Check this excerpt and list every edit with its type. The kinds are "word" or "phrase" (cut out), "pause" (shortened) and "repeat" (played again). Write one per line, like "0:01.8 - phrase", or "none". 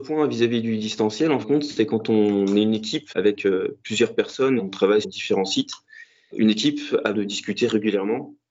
0:01.4 - word
0:03.1 - word
0:04.6 - word
0:05.0 - word
0:06.3 - word
0:07.1 - word